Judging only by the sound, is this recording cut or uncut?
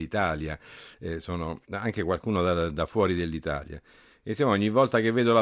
uncut